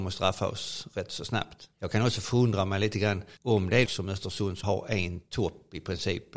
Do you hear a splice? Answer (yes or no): yes